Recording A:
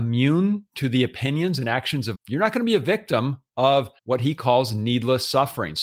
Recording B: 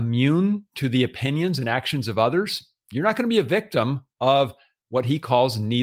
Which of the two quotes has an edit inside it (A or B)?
A